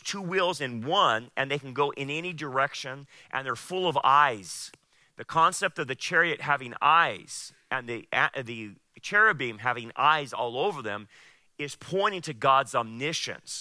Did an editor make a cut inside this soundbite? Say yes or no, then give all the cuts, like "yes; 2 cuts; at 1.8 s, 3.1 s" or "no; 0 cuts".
no; 0 cuts